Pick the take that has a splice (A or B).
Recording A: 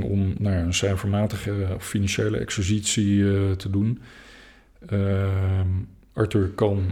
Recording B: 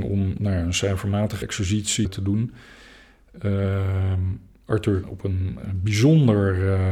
B